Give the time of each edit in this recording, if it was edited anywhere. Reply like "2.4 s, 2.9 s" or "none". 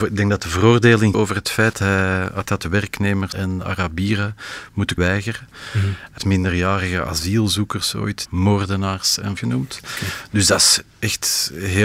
1.1 s, 1.7 s, 2.5 s, 3.3 s, 5.0 s, 6.2 s, 8.3 s, 9.4 s